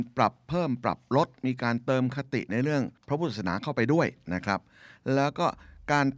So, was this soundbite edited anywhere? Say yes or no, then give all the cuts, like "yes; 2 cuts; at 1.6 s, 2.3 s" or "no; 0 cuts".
yes; 1 cut; at 3.0 s